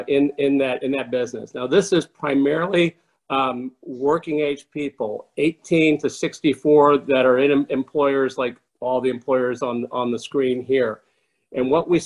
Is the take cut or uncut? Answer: uncut